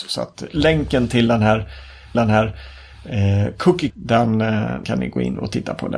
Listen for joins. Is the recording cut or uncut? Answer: cut